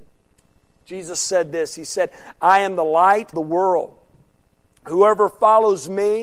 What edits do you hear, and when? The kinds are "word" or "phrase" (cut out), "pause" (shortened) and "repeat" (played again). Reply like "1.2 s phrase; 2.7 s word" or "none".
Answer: 3.3 s word